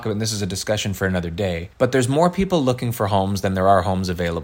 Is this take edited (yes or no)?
yes